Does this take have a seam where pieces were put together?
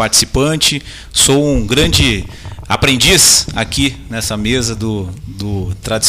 no; 0 cuts

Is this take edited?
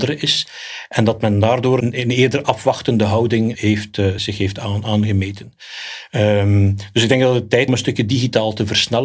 yes; 4 cuts; at 1.8 s, 3.5 s, 4.2 s, 7.7 s

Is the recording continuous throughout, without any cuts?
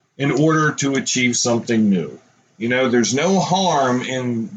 yes; 0 cuts

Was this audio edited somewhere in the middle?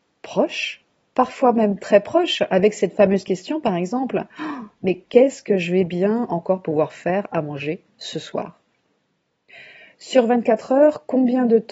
no; 0 cuts

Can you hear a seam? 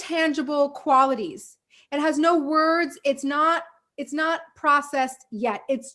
no; 0 cuts

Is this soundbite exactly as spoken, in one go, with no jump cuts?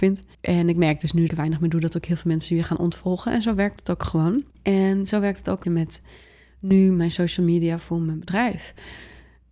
no; 3 cuts; at 1.3 s, 4.5 s, 5.6 s

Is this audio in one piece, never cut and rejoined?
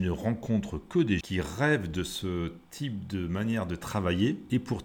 no; 1 cut; at 1.2 s

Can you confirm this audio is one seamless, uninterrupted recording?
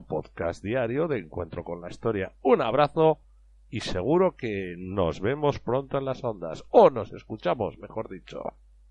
yes; 0 cuts

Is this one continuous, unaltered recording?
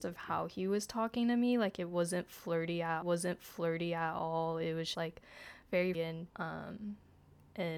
no; 4 cuts; at 3.0 s, 4.9 s, 5.9 s, 6.3 s

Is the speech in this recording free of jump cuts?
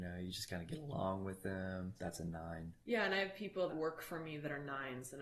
no; 1 cut; at 3.7 s

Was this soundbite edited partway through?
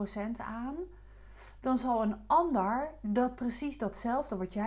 no; 0 cuts

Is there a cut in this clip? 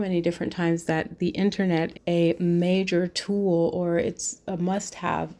yes; 1 cut; at 1.9 s

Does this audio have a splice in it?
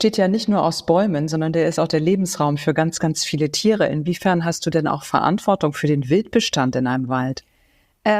no; 0 cuts

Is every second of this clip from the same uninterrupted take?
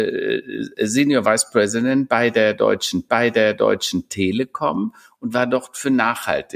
no; 1 cut; at 3.1 s

